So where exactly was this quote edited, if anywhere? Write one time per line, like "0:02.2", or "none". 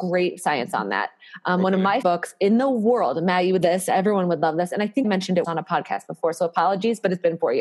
0:02.0
0:03.6
0:05.0
0:05.4